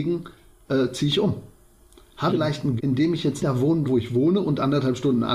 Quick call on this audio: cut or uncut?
cut